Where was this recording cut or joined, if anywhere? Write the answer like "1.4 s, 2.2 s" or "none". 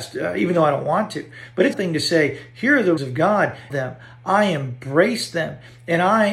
1.7 s, 3.0 s, 3.7 s